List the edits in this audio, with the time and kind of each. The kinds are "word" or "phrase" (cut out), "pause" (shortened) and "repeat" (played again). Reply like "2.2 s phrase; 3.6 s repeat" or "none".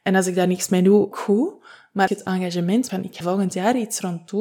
1.1 s word; 2.1 s word; 2.9 s word; 3.2 s word